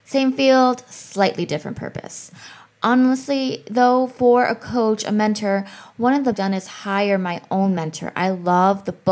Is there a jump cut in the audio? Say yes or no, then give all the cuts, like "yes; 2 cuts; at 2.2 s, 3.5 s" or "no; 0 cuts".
yes; 1 cut; at 6.3 s